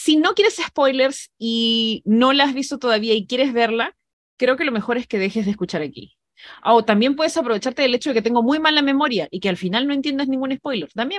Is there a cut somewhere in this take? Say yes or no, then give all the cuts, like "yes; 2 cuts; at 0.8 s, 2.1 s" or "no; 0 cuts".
no; 0 cuts